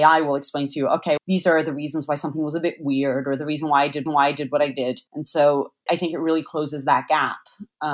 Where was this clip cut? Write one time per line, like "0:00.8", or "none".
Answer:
0:01.2
0:04.1
0:05.1
0:05.9